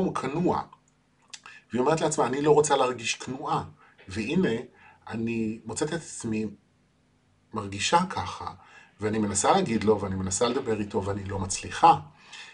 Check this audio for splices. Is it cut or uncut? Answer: uncut